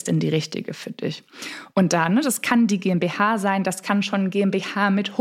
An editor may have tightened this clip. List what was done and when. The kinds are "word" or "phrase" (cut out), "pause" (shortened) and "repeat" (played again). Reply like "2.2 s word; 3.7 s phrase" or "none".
none

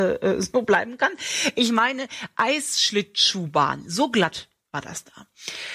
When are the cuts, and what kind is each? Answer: none

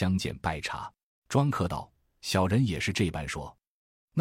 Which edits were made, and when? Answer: 1.1 s pause

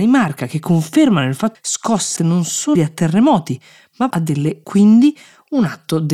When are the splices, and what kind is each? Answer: 1.5 s word; 2.2 s word; 2.8 s word; 4.1 s word; 4.6 s word

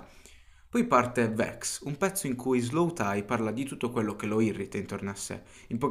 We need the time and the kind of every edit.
none

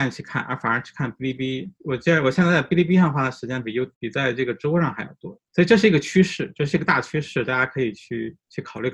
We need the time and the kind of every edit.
3.9 s pause; 5.5 s pause

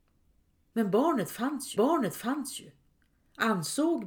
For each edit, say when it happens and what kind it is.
1.8 s repeat

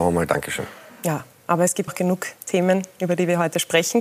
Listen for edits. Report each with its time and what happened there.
1.9 s word

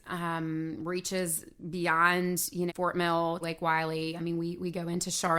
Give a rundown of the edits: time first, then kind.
2.7 s word; 3.4 s word

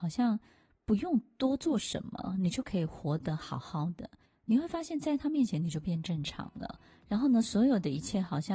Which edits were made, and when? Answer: 4.2 s pause

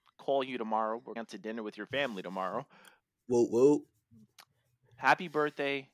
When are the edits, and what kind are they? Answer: 1.2 s word

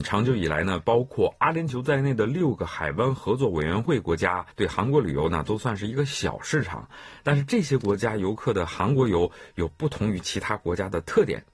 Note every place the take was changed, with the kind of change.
4.5 s pause

